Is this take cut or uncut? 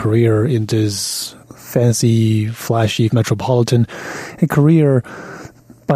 cut